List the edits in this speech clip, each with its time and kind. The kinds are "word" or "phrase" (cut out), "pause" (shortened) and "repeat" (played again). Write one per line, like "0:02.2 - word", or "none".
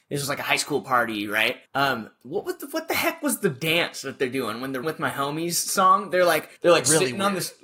0:01.7 - pause
0:04.8 - word
0:06.6 - pause

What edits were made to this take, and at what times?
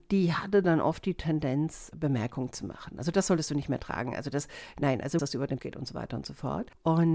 0:01.9 - word
0:05.2 - phrase
0:05.6 - word

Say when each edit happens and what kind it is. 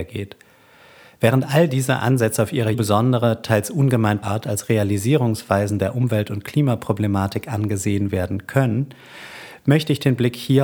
0:02.7 - word
0:04.2 - word

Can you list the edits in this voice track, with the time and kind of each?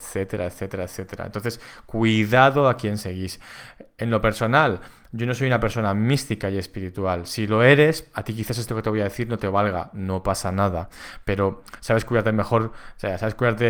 none

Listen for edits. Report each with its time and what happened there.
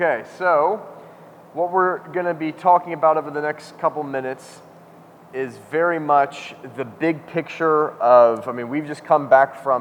none

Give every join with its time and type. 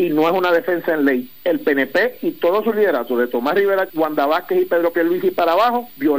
0:03.9 - word

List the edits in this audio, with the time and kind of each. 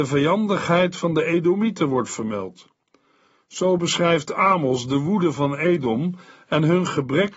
none

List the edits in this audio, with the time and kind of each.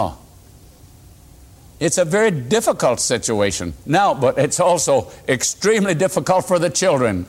0:03.8 - pause

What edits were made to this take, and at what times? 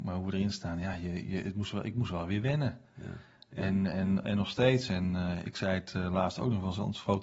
none

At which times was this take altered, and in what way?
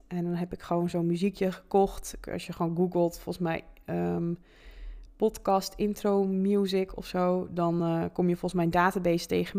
none

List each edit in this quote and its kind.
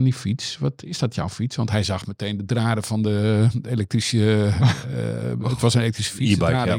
none

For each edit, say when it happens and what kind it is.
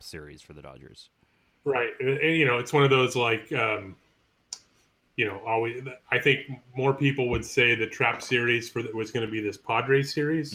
none

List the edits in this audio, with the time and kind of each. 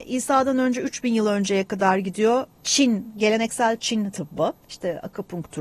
0:02.5 - pause
0:04.6 - pause

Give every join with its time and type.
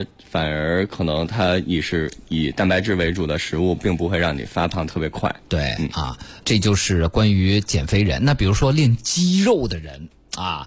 0:06.4 - word

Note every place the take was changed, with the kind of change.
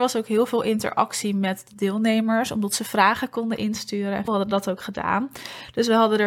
0:04.3 - word

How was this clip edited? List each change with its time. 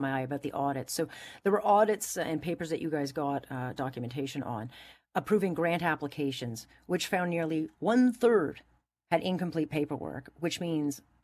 none

